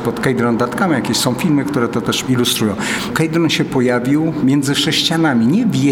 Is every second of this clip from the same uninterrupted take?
yes; 0 cuts

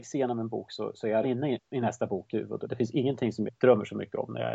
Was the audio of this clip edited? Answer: yes; 5 cuts; at 1.2 s, 1.6 s, 2.3 s, 2.6 s, 3.5 s

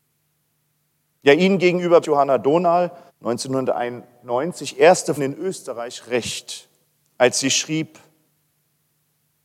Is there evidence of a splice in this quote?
yes; 3 cuts; at 2.0 s, 3.1 s, 5.2 s

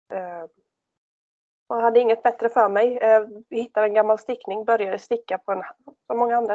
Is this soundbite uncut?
yes; 0 cuts

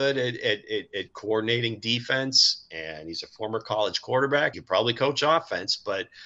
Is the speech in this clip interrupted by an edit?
yes; 1 cut; at 4.5 s

